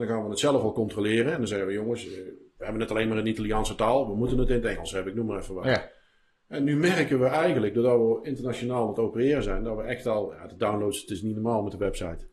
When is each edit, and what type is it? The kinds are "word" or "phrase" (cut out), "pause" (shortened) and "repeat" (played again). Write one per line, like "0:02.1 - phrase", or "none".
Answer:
none